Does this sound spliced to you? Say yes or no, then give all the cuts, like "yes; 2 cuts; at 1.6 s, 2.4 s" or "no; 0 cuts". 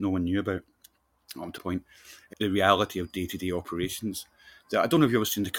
yes; 2 cuts; at 1.6 s, 2.3 s